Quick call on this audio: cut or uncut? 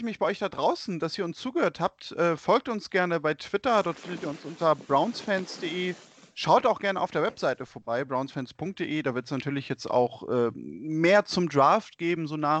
uncut